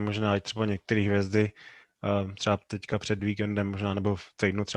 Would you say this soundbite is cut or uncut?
uncut